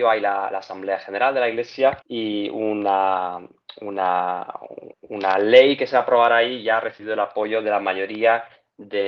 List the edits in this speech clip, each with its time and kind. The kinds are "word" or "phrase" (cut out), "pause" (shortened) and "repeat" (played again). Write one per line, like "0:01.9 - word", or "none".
0:02.0 - pause
0:04.9 - pause